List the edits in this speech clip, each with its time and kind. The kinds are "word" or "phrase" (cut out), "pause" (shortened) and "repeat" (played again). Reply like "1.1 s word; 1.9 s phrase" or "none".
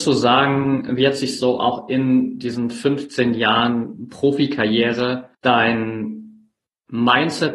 5.3 s pause